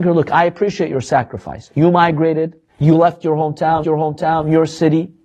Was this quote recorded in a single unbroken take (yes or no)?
no